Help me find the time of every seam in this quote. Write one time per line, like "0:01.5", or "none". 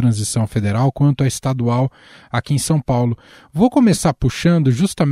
none